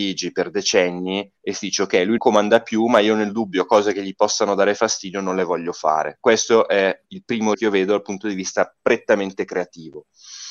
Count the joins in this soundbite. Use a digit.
3